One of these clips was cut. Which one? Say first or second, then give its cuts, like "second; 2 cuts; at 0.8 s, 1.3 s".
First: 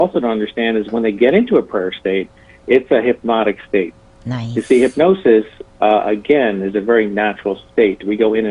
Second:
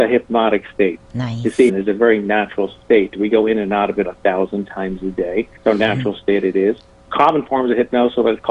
second; 4 cuts; at 1.0 s, 1.7 s, 4.0 s, 5.6 s